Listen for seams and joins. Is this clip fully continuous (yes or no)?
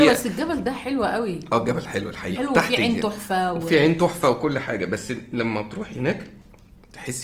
no